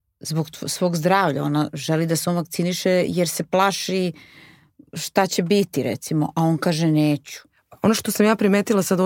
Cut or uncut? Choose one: uncut